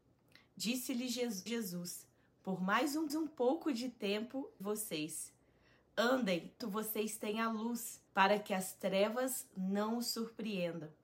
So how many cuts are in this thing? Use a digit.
5